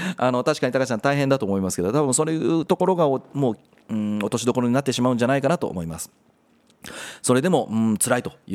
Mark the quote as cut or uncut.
uncut